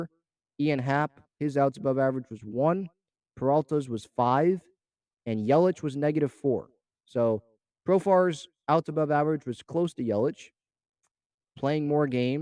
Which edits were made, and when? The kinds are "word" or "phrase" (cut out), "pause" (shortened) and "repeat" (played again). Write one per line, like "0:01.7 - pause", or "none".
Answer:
none